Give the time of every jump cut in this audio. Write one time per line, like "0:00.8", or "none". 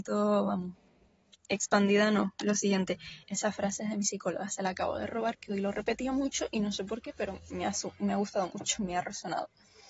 0:03.2